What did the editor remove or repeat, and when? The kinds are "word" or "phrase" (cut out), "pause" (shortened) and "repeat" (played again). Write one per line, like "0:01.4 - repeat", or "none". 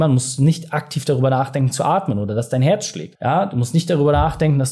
none